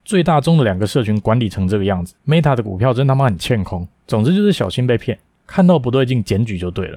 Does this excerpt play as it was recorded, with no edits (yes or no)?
no